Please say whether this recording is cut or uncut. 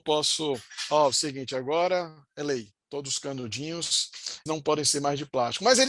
cut